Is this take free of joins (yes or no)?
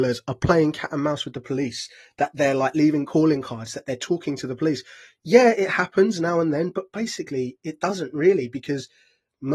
yes